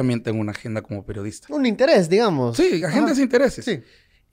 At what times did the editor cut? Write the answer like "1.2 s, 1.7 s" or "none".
none